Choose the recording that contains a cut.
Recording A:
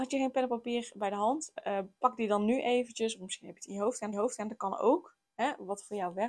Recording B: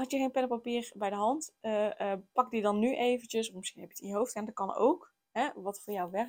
A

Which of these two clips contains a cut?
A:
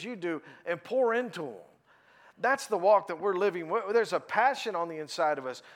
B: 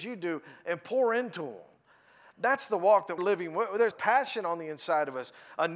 B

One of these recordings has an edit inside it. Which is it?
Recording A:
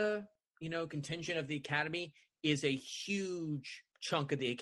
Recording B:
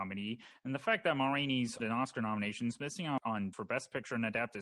B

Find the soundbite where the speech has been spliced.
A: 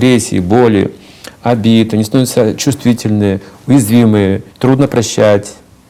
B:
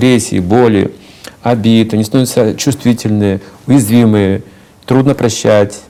A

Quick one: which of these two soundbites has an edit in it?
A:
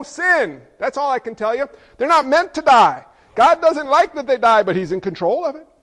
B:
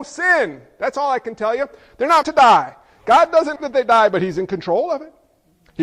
B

